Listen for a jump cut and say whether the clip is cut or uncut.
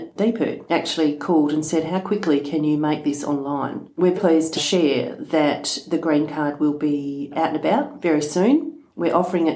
cut